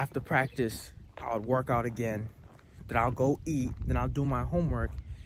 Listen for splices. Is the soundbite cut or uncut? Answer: uncut